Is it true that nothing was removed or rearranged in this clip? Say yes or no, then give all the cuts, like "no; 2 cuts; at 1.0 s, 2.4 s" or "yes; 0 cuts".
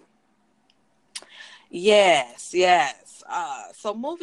yes; 0 cuts